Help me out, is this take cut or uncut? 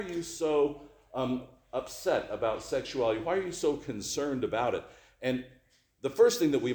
uncut